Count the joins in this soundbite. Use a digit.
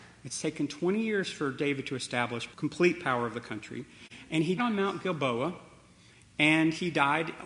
2